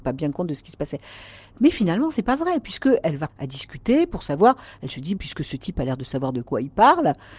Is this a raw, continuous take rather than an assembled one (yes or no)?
no